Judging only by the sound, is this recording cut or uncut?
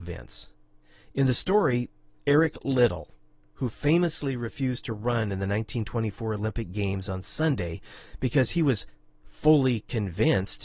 uncut